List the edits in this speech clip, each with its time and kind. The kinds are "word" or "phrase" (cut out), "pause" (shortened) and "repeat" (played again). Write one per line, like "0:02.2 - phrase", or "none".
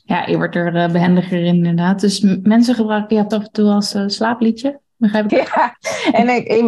0:03.3 - word
0:05.3 - word